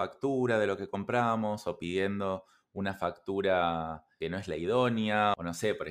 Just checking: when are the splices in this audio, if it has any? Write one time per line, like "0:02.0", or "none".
none